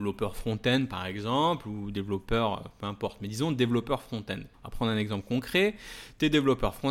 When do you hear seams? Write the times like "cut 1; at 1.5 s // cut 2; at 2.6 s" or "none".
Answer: cut 1; at 4.5 s